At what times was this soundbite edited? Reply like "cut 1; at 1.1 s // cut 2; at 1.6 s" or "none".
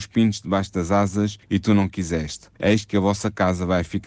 cut 1; at 1.4 s // cut 2; at 2.6 s